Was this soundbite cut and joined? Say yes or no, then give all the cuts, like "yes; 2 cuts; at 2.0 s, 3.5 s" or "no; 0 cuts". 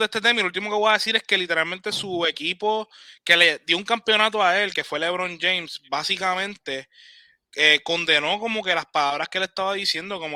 no; 0 cuts